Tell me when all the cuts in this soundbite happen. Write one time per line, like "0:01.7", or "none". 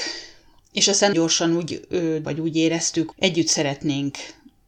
0:01.1
0:02.2
0:03.1